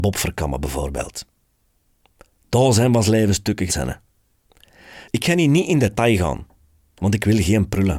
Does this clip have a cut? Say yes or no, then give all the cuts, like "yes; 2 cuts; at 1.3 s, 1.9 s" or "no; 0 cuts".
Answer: yes; 1 cut; at 3.7 s